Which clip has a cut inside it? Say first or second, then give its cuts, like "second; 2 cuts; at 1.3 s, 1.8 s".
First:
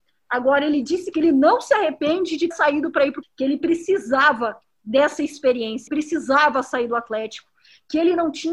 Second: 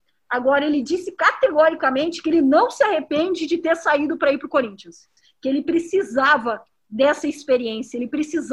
first; 4 cuts; at 1.1 s, 2.5 s, 3.2 s, 5.9 s